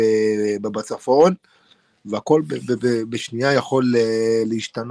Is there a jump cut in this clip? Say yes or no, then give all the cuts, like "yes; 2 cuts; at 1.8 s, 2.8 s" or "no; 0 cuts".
no; 0 cuts